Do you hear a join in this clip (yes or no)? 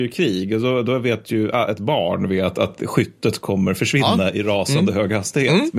no